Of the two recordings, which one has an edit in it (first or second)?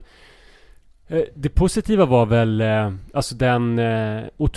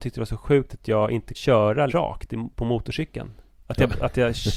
second